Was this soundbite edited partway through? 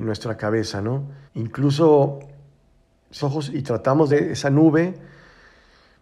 yes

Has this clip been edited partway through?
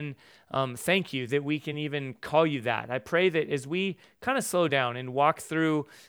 no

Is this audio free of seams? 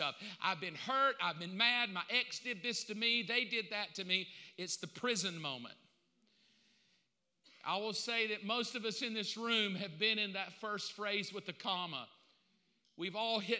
yes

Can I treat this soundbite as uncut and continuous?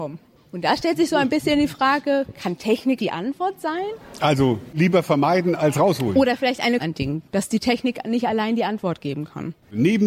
no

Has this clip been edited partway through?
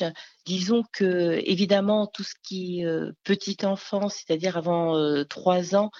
no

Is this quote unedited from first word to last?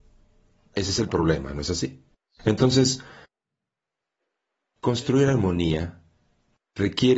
yes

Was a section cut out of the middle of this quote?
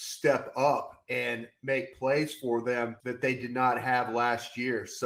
yes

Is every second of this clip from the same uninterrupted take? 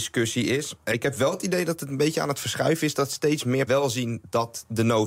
no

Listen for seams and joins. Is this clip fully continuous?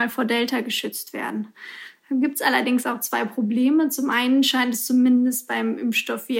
yes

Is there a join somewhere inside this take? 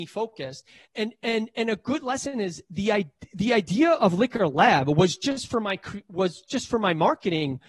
no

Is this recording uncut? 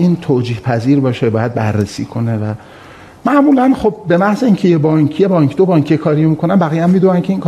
yes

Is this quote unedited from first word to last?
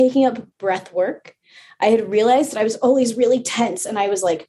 yes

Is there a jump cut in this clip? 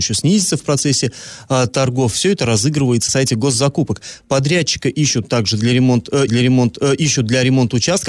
yes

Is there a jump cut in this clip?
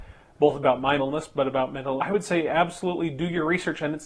yes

